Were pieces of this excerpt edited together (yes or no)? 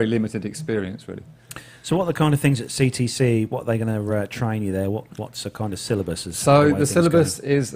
no